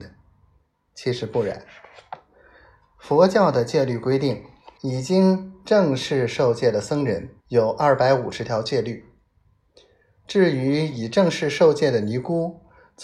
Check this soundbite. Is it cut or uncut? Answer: cut